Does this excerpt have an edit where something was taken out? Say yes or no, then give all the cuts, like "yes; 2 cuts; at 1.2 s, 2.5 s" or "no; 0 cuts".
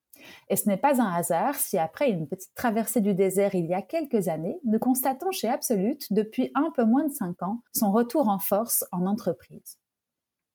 yes; 1 cut; at 7.7 s